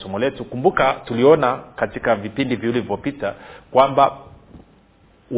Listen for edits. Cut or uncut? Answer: uncut